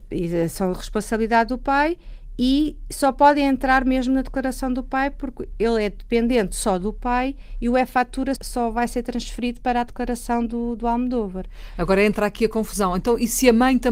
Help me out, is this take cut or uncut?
cut